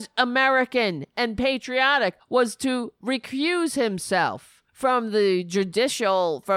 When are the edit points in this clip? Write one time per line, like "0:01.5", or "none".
0:04.7